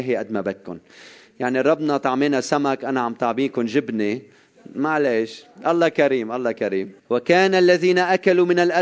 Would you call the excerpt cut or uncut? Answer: cut